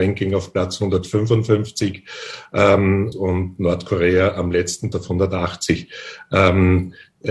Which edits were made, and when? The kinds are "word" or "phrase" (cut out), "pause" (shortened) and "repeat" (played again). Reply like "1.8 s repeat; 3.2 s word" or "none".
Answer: 3.1 s word; 4.9 s word